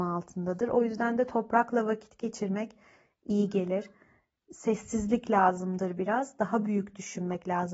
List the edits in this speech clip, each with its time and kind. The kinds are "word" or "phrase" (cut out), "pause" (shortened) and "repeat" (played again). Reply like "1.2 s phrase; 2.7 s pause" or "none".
none